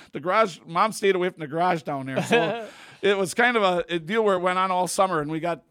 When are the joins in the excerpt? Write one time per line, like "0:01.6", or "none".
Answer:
none